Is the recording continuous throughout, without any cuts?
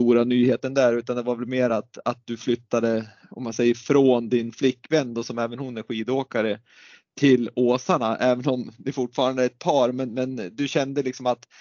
yes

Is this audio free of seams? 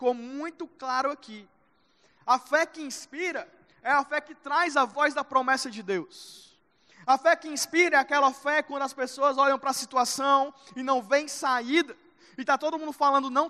yes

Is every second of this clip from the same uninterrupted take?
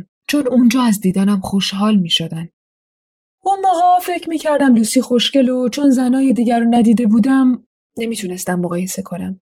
yes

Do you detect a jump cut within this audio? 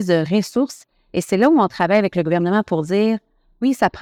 no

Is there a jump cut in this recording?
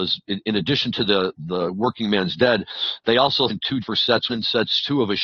yes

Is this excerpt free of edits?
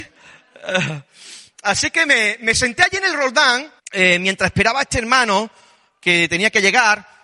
no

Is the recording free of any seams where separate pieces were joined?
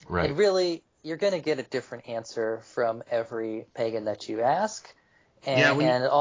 yes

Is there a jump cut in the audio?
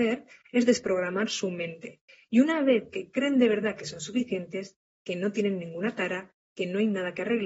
no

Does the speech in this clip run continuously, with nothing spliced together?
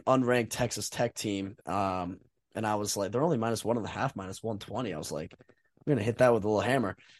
no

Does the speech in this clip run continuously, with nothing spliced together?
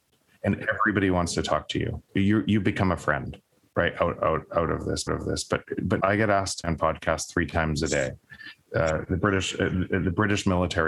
no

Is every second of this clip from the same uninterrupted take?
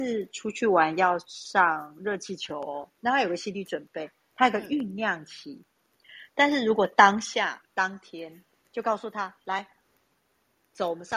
no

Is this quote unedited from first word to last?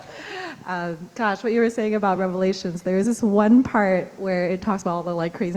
yes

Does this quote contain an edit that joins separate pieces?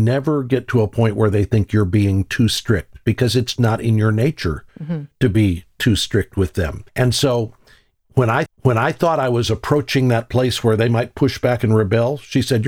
yes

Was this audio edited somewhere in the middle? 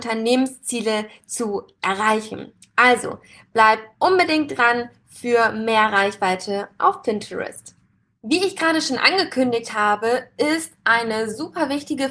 no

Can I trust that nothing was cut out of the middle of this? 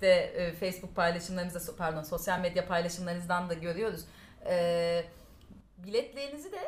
yes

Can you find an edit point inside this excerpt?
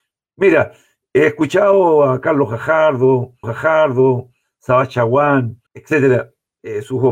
yes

